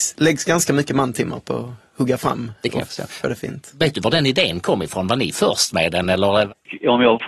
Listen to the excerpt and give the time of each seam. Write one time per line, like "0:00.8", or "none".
none